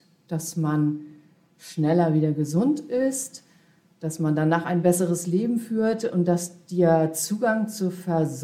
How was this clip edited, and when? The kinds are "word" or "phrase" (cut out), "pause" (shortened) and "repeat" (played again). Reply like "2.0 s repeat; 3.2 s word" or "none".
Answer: none